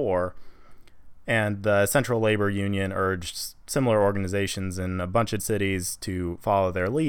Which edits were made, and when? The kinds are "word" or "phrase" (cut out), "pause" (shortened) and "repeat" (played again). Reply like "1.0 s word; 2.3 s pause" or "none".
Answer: 5.4 s word